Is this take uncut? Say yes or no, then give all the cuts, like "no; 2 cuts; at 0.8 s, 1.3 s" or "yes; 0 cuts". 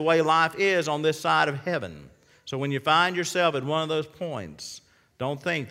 yes; 0 cuts